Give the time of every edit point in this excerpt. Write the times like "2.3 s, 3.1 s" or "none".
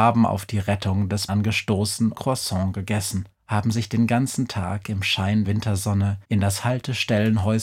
1.3 s, 2.1 s, 3.4 s, 5.4 s, 6.2 s